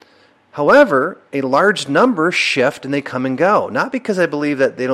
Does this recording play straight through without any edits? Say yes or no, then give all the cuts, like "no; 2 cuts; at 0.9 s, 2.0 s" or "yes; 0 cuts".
yes; 0 cuts